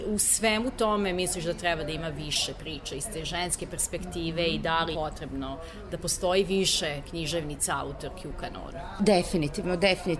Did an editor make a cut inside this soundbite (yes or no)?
yes